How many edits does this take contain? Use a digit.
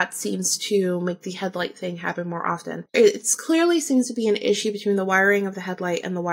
1